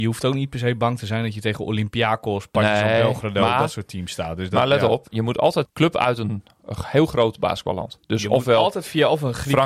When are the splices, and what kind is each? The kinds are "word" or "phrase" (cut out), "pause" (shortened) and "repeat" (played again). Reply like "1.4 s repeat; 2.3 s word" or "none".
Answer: 5.6 s phrase